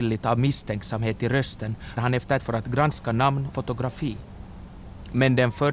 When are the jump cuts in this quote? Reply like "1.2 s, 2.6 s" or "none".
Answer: 2.0 s, 2.4 s, 3.5 s